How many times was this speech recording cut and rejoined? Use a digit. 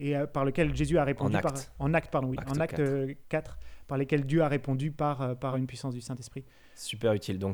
1